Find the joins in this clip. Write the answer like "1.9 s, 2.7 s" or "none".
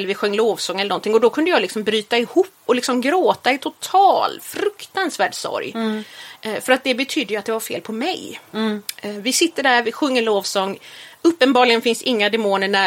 2.7 s